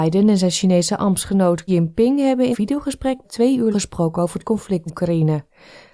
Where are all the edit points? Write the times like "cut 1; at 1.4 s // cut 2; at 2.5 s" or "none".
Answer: cut 1; at 1.7 s // cut 2; at 2.5 s // cut 3; at 3.2 s // cut 4; at 3.7 s // cut 5; at 4.9 s